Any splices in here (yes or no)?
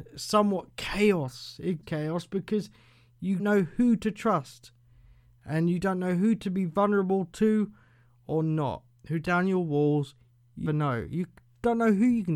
yes